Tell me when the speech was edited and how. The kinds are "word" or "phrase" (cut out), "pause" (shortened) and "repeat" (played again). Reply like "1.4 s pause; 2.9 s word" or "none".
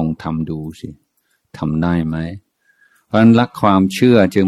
none